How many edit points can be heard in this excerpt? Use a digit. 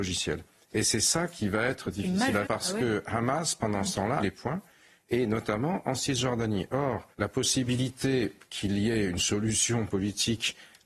3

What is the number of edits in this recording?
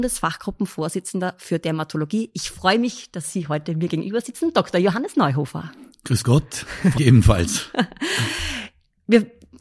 1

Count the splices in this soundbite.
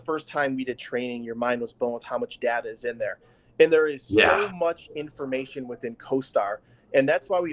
0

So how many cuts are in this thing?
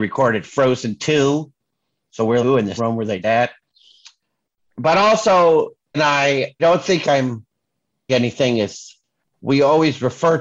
6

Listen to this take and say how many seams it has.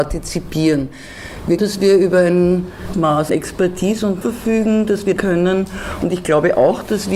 5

